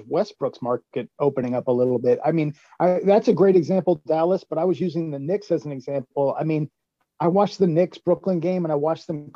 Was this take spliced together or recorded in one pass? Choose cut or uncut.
uncut